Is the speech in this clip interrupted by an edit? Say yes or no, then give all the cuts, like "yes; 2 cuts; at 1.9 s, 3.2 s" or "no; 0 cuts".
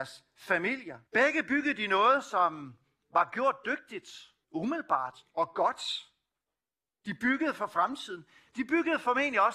yes; 2 cuts; at 1.1 s, 4.4 s